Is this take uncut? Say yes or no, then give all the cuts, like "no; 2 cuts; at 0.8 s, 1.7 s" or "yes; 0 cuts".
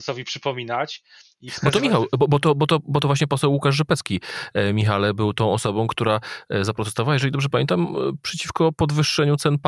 yes; 0 cuts